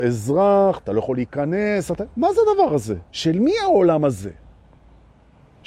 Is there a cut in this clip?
yes; 1 cut; at 3.1 s

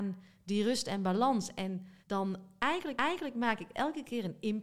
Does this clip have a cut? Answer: yes; 2 cuts; at 2.0 s, 3.0 s

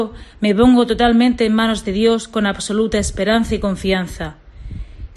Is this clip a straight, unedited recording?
yes; 0 cuts

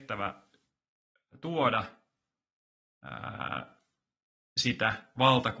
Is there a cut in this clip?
no; 0 cuts

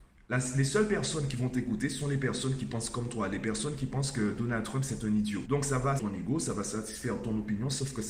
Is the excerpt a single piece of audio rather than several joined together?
no; 1 cut; at 6.0 s

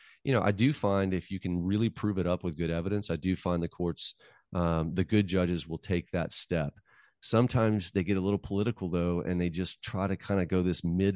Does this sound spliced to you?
no; 0 cuts

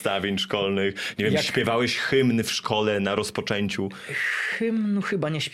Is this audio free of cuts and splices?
yes; 0 cuts

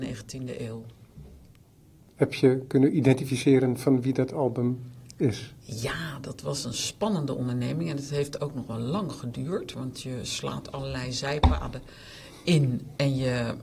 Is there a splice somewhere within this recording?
no; 0 cuts

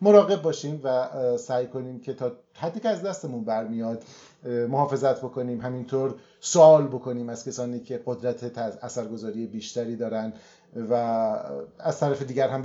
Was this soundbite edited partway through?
no; 0 cuts

